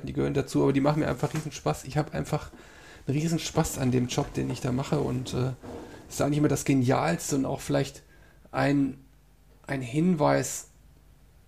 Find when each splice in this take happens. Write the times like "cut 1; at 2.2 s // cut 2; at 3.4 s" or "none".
none